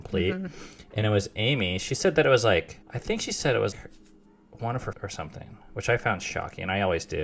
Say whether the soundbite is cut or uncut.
cut